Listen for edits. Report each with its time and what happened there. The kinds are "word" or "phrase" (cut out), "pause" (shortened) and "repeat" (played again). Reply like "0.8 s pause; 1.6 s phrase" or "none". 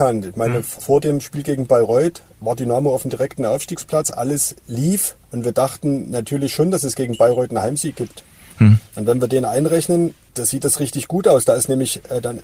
5.2 s pause